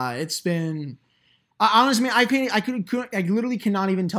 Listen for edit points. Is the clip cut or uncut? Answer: uncut